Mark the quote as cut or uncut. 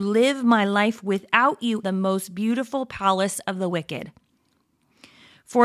cut